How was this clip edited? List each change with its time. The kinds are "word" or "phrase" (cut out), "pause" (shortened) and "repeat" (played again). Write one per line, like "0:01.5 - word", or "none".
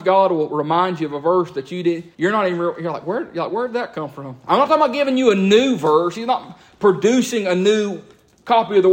0:02.1 - pause